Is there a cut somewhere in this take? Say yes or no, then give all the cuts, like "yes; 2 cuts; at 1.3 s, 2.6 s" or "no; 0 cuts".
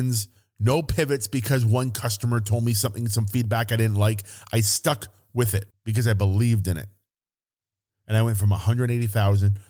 yes; 1 cut; at 5.7 s